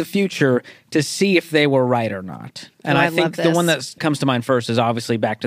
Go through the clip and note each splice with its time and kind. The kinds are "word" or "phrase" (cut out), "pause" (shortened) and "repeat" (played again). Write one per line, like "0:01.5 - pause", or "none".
0:02.7 - pause
0:04.0 - word